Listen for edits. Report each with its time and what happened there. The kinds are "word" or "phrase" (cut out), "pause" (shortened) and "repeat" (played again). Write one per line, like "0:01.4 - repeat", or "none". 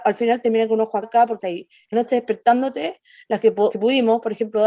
0:01.0 - word
0:01.4 - word
0:01.9 - word
0:03.7 - word

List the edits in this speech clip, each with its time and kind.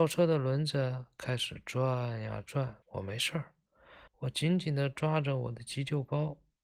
0:02.8 - pause
0:04.1 - pause

